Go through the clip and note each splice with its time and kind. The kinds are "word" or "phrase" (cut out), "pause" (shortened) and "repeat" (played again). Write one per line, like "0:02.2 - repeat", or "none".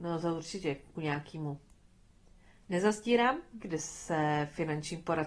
0:00.9 - word
0:03.6 - phrase